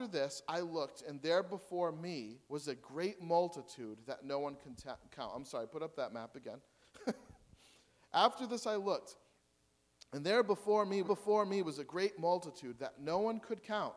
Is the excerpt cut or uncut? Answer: cut